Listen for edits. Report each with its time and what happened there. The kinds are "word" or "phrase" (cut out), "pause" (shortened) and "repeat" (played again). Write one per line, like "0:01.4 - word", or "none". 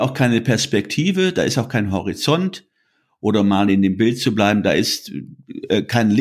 none